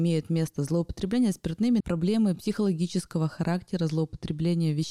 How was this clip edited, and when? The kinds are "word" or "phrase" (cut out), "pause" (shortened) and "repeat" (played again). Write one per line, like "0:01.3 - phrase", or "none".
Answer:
0:01.8 - word